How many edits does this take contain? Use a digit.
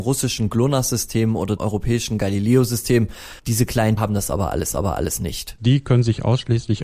4